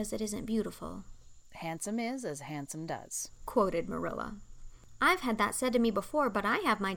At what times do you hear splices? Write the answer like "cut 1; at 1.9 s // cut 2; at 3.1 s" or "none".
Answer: none